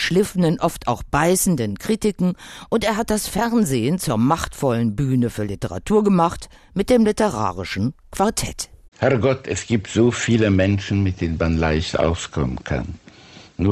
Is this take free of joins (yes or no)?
yes